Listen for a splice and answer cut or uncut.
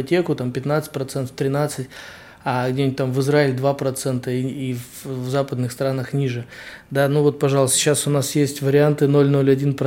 uncut